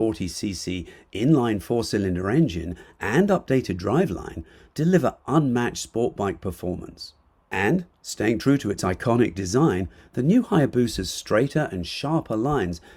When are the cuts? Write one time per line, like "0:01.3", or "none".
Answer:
none